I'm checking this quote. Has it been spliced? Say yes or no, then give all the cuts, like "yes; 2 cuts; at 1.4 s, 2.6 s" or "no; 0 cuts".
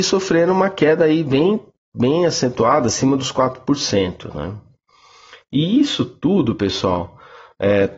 no; 0 cuts